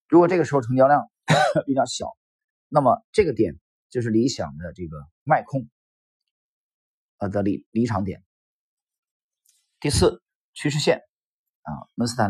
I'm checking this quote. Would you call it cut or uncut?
cut